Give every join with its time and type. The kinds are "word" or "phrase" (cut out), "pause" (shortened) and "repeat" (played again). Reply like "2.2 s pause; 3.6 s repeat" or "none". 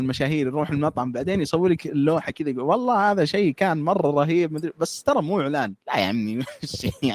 5.8 s pause

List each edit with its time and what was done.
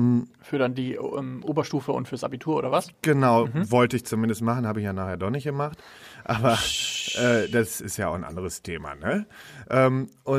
none

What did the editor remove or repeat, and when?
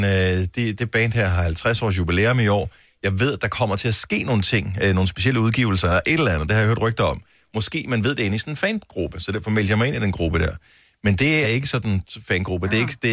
11.4 s word

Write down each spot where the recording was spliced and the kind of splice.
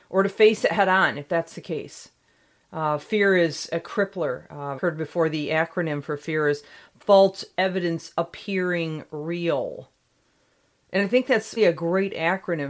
4.8 s word; 11.6 s word

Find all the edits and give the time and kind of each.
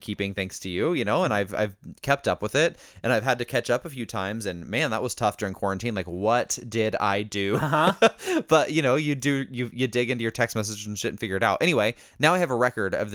none

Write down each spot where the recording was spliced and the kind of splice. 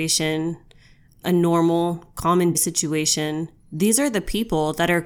2.5 s word

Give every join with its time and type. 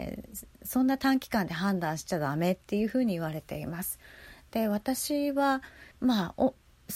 5.9 s pause

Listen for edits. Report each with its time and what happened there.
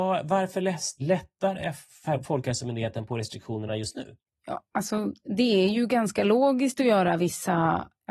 none

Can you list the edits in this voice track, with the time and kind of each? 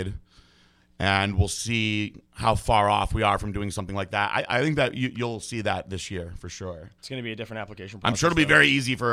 2.3 s pause; 7.0 s pause

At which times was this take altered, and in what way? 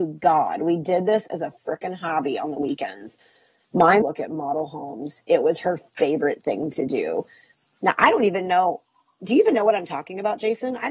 4.0 s phrase

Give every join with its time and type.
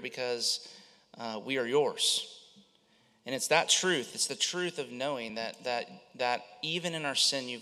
none

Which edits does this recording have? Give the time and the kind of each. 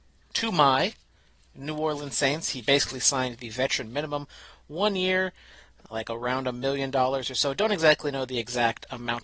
none

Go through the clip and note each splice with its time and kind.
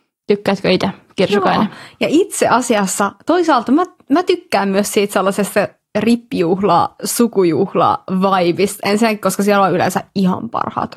none

